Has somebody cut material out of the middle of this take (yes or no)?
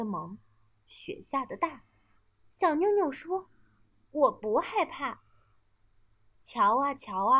no